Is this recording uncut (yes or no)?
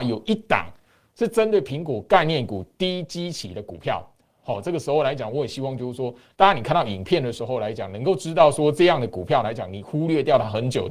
yes